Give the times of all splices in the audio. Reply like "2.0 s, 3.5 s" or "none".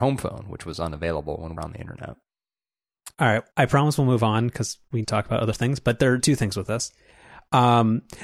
1.6 s, 3.1 s, 3.5 s, 5.0 s, 6.2 s